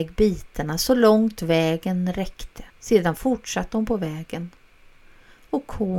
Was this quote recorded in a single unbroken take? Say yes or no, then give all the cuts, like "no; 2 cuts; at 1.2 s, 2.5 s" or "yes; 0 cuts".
no; 1 cut; at 2.7 s